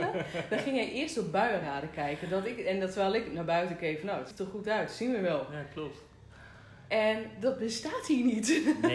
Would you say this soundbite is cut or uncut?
cut